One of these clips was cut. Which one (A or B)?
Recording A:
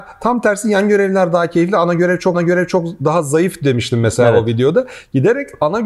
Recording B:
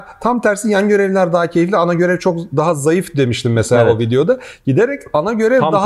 A